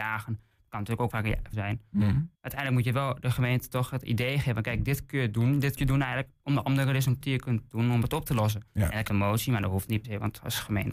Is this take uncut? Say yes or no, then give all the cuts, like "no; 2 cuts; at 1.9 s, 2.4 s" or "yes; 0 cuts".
no; 9 cuts; at 1.1 s, 1.5 s, 2.4 s, 5.8 s, 6.4 s, 7.2 s, 8.7 s, 9.1 s, 10.0 s